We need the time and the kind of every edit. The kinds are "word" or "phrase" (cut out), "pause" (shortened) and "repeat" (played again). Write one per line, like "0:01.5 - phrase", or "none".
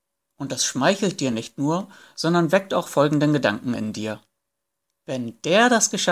none